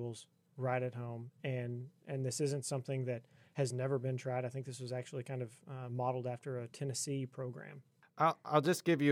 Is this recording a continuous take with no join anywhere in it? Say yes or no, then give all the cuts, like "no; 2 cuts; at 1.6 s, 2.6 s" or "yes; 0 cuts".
yes; 0 cuts